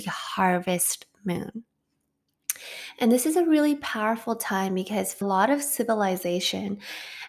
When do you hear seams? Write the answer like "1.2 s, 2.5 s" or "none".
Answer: 5.2 s